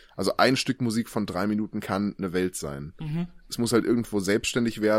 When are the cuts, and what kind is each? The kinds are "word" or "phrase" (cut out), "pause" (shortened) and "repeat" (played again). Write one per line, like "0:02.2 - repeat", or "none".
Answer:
none